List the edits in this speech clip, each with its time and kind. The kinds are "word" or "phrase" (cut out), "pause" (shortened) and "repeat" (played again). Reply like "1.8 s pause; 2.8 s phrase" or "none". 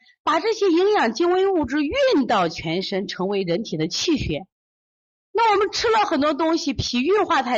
4.8 s pause

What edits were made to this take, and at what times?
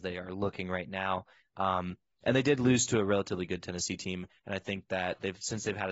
none

